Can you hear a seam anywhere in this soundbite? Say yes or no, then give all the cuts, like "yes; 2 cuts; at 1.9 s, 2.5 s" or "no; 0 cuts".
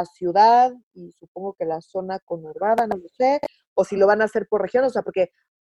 no; 0 cuts